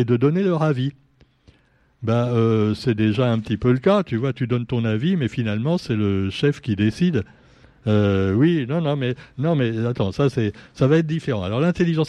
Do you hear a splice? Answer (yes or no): no